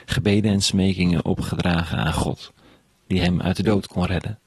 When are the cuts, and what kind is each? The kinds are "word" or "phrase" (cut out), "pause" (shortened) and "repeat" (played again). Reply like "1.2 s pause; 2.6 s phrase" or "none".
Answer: none